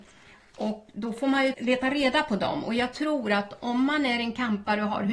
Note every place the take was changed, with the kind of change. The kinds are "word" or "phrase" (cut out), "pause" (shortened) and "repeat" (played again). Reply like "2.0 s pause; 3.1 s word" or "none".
1.5 s word